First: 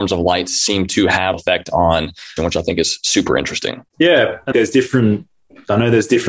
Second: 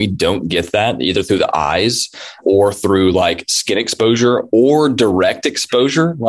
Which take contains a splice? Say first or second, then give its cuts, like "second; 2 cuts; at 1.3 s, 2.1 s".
first; 4 cuts; at 1.3 s, 2.4 s, 3.9 s, 4.5 s